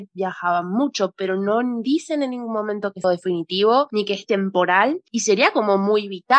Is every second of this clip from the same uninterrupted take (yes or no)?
no